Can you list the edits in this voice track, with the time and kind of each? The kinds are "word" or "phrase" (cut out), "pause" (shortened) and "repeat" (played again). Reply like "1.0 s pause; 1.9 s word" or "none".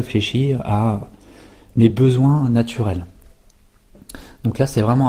none